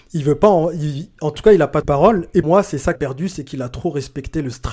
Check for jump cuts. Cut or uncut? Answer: cut